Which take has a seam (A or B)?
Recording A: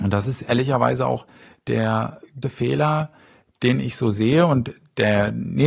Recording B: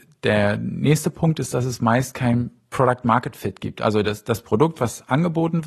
A